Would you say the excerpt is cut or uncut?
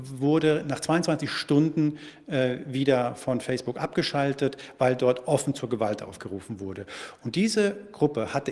uncut